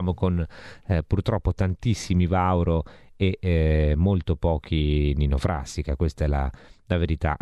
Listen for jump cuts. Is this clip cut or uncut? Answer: uncut